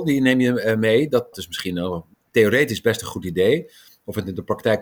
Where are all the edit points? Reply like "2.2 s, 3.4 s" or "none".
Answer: 1.3 s, 2.1 s